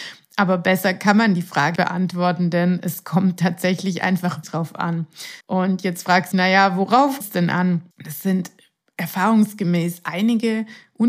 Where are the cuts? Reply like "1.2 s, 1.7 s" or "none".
1.8 s, 4.4 s, 5.4 s, 6.3 s, 7.2 s, 7.9 s